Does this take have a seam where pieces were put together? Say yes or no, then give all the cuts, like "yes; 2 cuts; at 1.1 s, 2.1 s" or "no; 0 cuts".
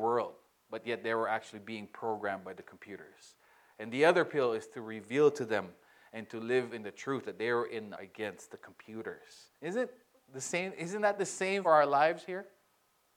yes; 3 cuts; at 7.9 s, 9.6 s, 11.6 s